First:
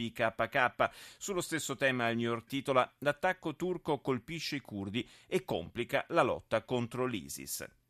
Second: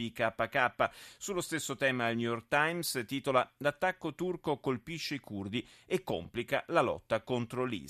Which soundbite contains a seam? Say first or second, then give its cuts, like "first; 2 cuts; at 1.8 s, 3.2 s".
first; 1 cut; at 2.5 s